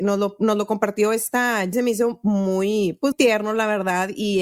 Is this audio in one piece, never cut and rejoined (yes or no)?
no